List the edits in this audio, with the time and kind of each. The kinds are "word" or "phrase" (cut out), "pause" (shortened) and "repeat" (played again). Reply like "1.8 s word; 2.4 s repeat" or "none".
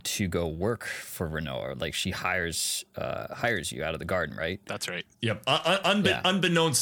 5.1 s pause